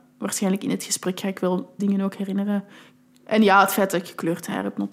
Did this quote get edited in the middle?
yes; 1 cut; at 1.8 s

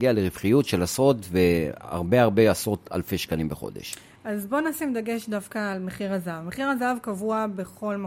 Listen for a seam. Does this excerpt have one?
no; 0 cuts

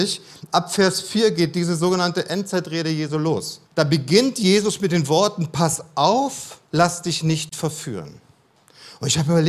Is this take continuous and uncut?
no; 2 cuts; at 3.7 s, 6.7 s

